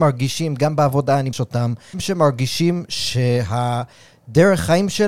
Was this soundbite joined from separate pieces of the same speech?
yes; 2 cuts; at 1.3 s, 1.9 s

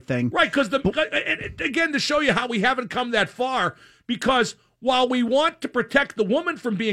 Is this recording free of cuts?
yes; 0 cuts

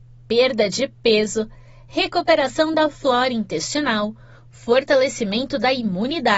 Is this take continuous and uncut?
yes; 0 cuts

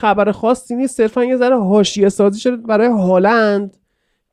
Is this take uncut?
yes; 0 cuts

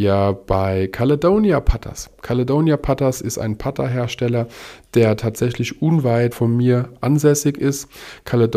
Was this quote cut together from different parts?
yes; 1 cut; at 6.3 s

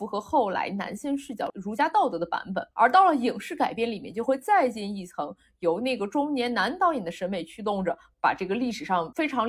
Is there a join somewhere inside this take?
yes; 1 cut; at 2.7 s

